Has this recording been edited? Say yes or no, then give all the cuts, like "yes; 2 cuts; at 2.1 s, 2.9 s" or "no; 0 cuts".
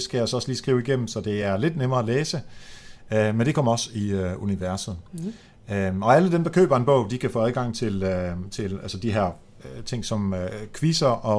no; 0 cuts